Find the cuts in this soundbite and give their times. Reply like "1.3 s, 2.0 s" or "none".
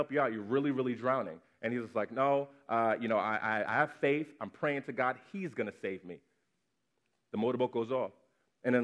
none